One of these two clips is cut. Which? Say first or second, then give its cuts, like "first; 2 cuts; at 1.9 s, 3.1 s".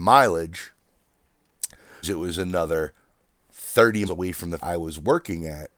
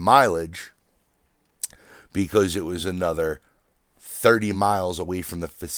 first; 3 cuts; at 2.0 s, 4.1 s, 4.6 s